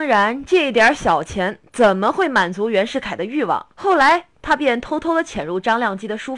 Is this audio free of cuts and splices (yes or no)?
no